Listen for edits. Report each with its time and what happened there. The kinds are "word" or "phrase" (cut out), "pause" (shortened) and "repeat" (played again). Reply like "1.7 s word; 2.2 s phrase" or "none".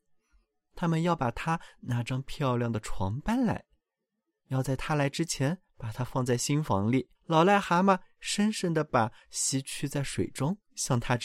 7.1 s pause